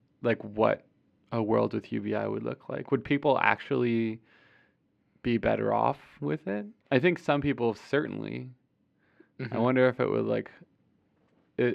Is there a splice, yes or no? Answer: yes